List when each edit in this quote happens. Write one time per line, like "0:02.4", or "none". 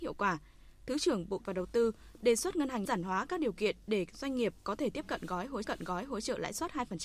0:01.4
0:02.8
0:05.6

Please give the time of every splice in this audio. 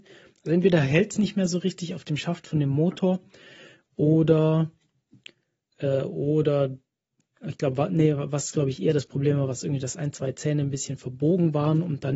none

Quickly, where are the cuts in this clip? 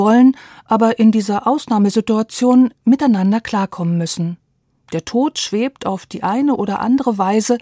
none

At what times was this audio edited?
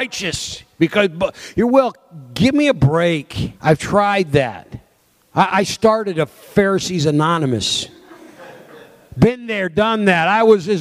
0:03.6
0:05.0

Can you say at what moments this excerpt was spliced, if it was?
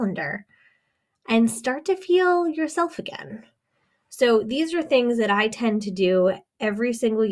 none

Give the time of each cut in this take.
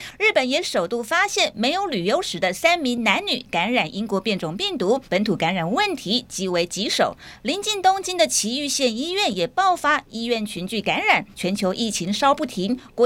0:05.0
0:11.3

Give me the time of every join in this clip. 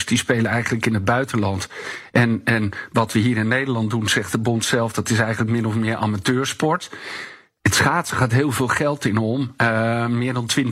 none

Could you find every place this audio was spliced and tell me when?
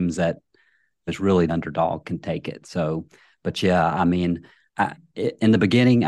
0:01.1
0:01.5
0:04.7

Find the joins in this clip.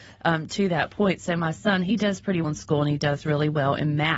0:02.4

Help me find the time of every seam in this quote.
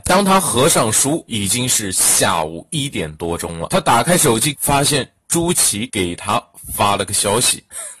0:04.5

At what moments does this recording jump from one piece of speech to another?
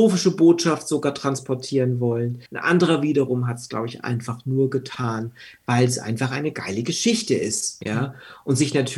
0:02.5

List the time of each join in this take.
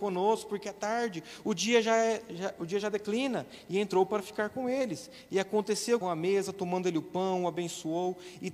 0:06.0

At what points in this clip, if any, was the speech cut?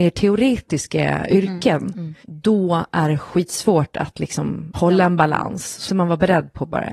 0:02.2
0:04.7
0:05.9

